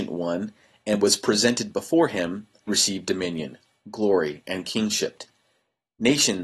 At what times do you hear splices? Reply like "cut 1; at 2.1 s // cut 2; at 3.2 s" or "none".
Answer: cut 1; at 2.7 s